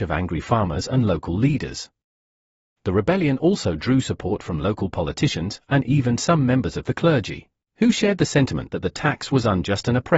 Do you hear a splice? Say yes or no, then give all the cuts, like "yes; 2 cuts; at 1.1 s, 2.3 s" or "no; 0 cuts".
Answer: no; 0 cuts